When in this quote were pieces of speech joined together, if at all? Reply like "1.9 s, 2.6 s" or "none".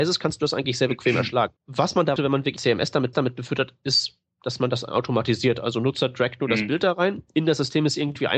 1.6 s, 2.2 s, 2.6 s, 3.1 s